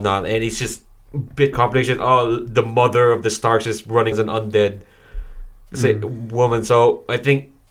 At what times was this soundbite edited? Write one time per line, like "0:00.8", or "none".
0:01.5
0:04.1